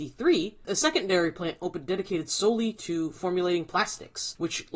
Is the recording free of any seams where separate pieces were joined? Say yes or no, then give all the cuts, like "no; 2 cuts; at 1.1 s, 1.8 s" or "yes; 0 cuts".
yes; 0 cuts